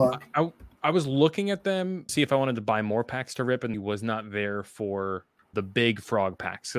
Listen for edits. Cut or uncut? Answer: cut